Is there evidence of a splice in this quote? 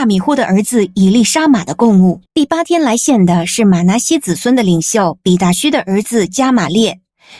yes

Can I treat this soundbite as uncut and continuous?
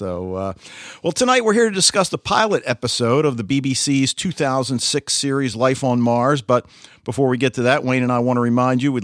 yes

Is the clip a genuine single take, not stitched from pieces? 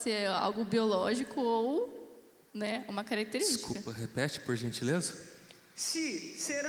yes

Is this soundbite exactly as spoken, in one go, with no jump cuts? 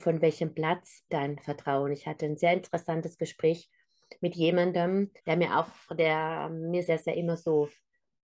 no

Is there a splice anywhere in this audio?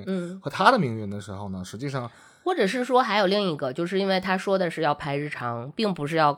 no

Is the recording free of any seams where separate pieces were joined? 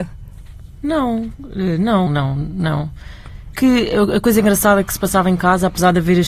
no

